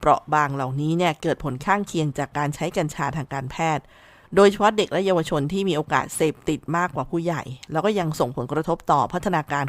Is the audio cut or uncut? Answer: uncut